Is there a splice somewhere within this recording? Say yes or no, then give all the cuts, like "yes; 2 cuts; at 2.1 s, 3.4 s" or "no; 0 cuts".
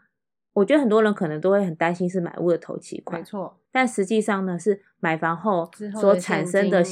yes; 1 cut; at 3.7 s